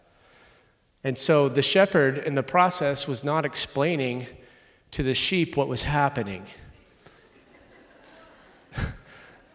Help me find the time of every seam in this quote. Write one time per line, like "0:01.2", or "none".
none